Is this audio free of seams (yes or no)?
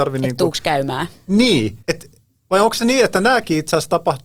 no